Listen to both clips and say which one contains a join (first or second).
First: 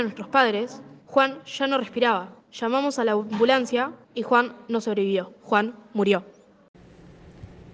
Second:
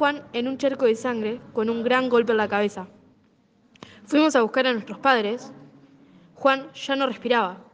first